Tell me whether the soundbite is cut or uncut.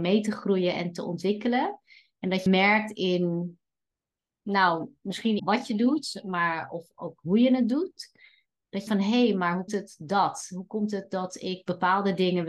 cut